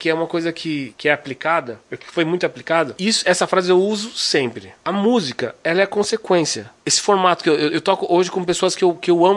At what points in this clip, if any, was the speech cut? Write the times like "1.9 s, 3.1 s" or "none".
none